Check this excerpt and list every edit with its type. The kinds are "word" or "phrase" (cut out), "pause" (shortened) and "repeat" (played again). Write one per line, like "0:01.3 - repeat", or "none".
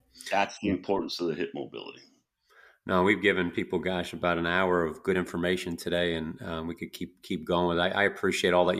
none